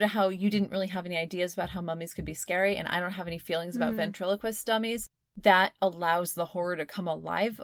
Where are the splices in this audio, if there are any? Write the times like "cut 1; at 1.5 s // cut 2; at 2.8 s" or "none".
none